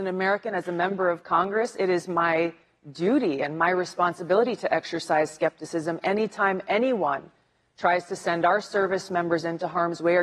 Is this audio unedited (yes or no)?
yes